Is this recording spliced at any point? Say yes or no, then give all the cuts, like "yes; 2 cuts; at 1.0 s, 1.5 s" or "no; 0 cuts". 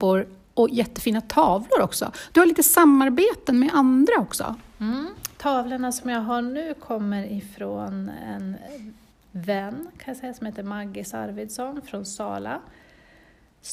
no; 0 cuts